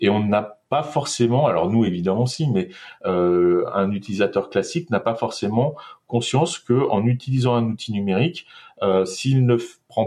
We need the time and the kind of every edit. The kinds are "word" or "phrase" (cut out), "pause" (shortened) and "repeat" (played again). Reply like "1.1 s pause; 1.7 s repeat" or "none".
none

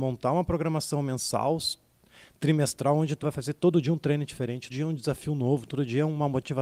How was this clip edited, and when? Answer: 3.2 s word; 4.7 s word

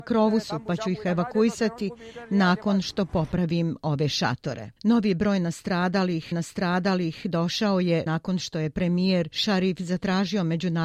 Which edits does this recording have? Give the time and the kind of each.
4.8 s pause; 6.3 s repeat; 8.1 s word

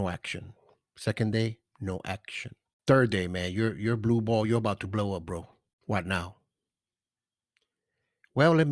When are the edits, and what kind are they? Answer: none

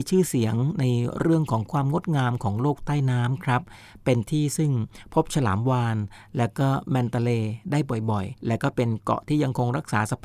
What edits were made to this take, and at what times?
8.4 s pause

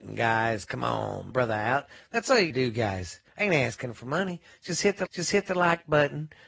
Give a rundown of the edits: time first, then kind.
1.3 s phrase; 2.5 s word; 3.3 s pause; 5.1 s repeat

